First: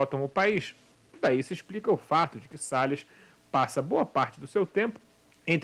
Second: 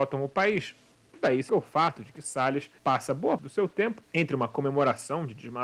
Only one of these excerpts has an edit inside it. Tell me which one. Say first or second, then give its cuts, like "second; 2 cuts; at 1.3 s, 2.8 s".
second; 4 cuts; at 1.5 s, 2.8 s, 3.4 s, 4.0 s